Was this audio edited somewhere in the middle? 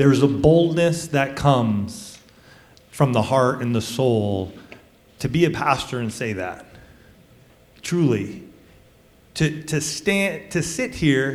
no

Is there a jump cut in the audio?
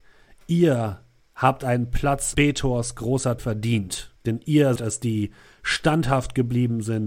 yes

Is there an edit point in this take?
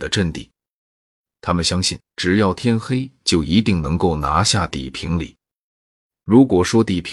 yes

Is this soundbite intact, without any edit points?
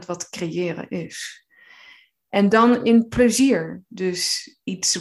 yes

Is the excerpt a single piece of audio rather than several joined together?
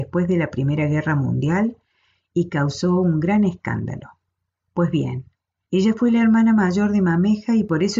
yes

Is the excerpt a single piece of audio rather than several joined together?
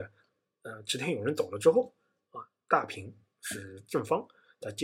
yes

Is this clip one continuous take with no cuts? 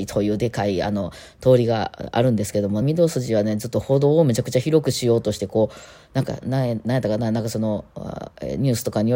no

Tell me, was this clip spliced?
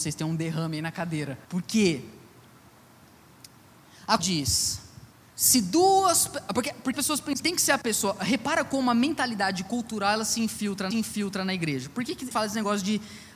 yes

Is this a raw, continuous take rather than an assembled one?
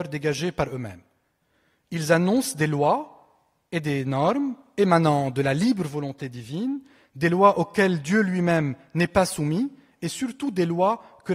yes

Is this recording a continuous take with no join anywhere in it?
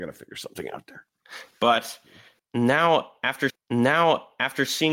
no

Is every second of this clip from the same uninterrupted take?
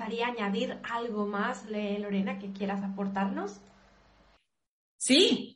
yes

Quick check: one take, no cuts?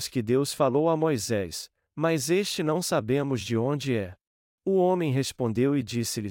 no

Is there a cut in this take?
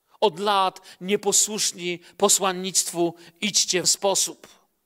yes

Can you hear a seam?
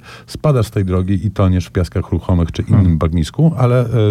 no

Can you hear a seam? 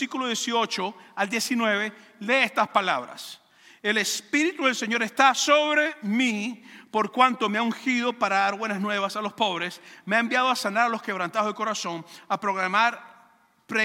no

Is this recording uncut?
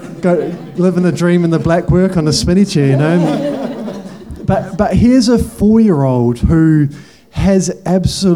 yes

